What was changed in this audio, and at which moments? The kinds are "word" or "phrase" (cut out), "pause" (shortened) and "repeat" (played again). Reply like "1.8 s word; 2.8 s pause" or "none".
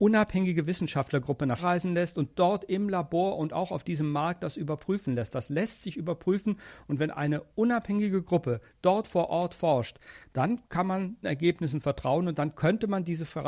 1.6 s word; 10.6 s pause; 11.2 s word